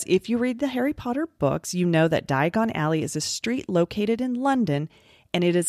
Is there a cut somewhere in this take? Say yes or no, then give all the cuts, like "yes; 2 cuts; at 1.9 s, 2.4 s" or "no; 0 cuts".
no; 0 cuts